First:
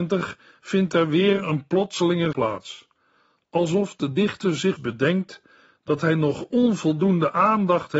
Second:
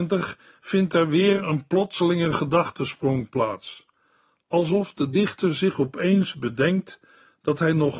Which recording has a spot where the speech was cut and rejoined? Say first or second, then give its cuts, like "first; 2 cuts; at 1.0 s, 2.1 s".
first; 2 cuts; at 2.3 s, 4.8 s